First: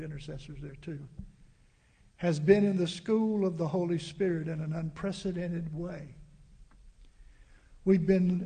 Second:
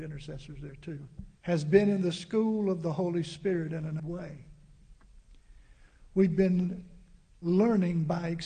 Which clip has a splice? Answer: second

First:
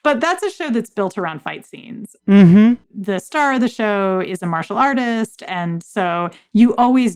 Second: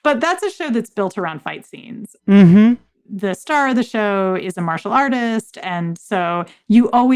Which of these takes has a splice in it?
first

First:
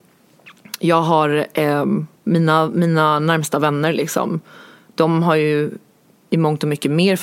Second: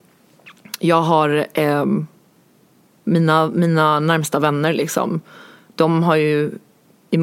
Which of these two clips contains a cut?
first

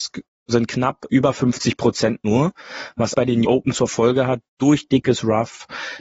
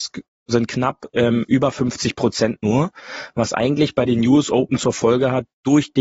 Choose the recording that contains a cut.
first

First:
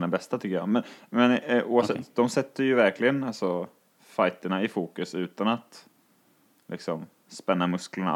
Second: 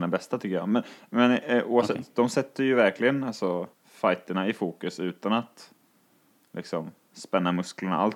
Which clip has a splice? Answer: second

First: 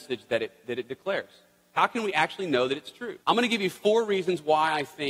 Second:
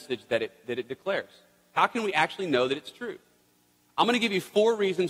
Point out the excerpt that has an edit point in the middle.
first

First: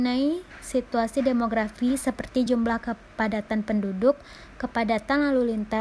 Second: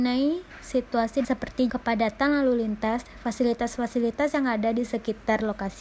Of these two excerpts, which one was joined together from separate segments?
second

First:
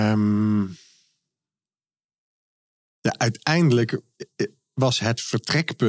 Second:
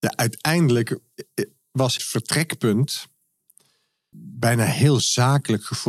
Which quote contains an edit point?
second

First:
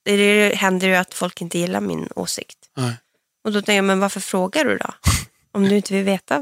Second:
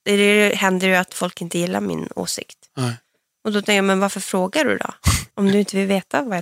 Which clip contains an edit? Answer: second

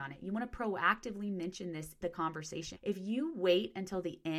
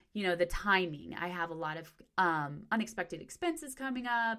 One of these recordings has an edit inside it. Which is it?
first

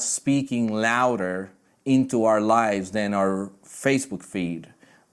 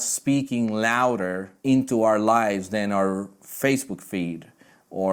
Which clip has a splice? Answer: second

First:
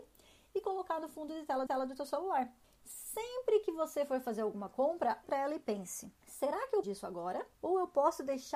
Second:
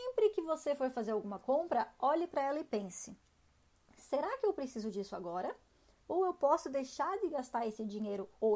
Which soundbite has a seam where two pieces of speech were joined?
first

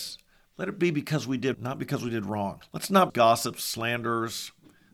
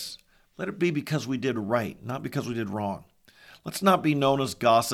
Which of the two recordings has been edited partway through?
first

